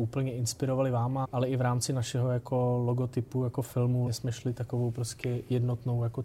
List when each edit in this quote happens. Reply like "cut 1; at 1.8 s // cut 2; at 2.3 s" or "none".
cut 1; at 1.2 s // cut 2; at 4.1 s